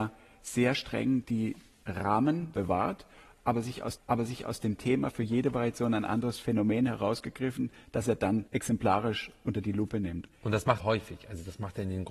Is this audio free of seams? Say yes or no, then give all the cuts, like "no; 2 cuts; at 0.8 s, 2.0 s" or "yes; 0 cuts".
no; 4 cuts; at 4.0 s, 8.5 s, 10.3 s, 10.8 s